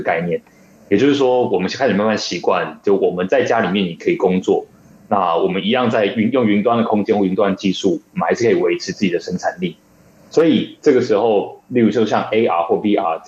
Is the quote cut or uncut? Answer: uncut